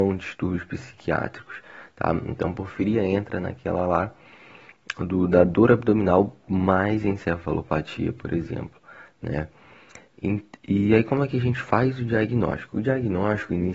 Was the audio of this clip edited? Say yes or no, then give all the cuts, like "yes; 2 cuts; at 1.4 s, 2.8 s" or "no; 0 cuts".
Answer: no; 0 cuts